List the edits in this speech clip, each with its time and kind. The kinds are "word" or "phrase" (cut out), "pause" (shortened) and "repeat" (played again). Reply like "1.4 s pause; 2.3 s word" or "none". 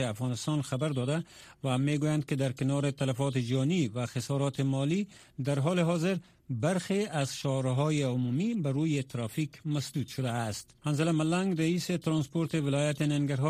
10.8 s pause